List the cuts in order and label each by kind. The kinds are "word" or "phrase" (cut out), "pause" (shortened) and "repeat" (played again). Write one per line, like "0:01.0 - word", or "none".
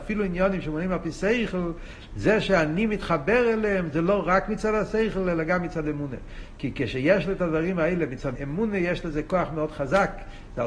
0:08.3 - word